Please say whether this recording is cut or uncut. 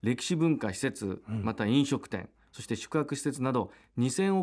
uncut